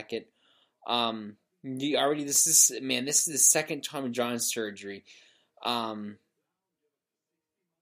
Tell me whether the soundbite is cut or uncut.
uncut